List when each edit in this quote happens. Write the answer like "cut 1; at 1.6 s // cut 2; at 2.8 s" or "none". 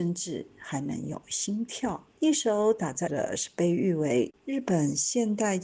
cut 1; at 2.1 s // cut 2; at 3.1 s // cut 3; at 4.4 s